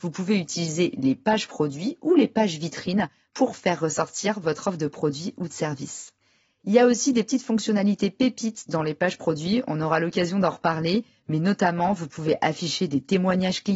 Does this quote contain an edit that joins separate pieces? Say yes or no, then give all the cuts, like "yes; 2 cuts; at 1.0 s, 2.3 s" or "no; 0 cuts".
no; 0 cuts